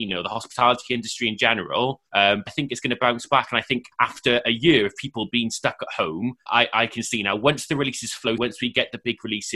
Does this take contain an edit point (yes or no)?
yes